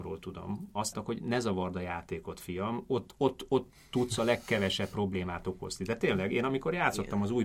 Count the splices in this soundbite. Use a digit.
1